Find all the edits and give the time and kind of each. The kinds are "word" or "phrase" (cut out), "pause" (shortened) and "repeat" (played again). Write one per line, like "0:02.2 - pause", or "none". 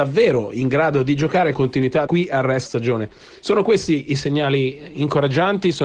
0:01.5 - word
0:02.1 - word
0:02.7 - word